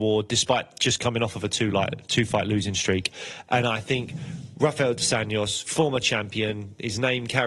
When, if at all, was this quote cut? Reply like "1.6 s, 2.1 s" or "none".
none